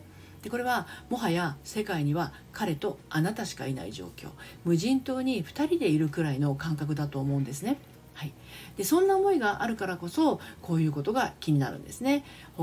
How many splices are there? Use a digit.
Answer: 0